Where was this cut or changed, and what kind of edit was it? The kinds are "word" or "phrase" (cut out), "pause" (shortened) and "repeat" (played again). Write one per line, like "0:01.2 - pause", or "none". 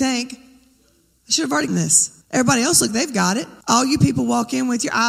0:01.7 - word
0:02.2 - pause
0:02.9 - word
0:03.6 - pause